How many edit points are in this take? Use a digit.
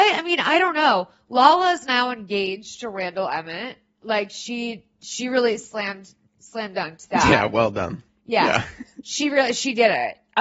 0